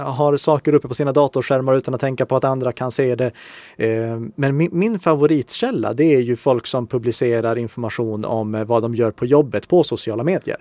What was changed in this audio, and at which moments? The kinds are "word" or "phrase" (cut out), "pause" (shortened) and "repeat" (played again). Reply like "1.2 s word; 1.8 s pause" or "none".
none